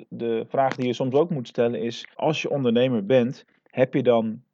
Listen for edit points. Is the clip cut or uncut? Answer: cut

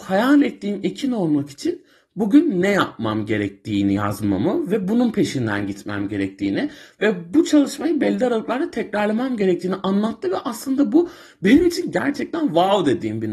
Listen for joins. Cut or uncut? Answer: uncut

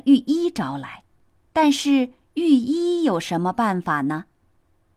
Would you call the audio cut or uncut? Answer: cut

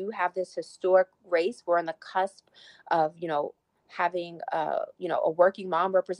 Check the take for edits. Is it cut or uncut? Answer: uncut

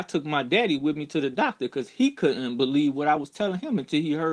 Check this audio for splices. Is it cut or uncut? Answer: uncut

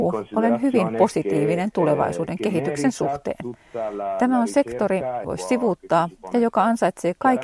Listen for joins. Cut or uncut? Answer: cut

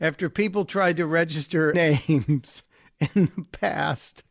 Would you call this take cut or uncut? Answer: cut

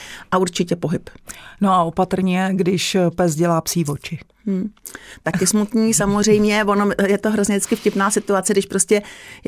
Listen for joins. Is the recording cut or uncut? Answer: cut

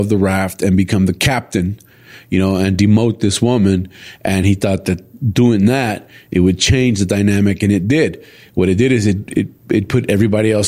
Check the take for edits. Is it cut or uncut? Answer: uncut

